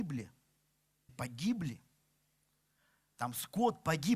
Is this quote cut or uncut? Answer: cut